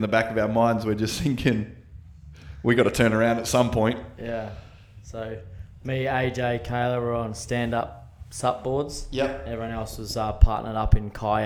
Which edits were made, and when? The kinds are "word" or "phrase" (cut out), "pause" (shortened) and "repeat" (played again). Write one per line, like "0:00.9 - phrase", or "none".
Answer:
none